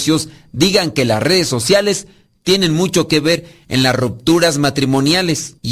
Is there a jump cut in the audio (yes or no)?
no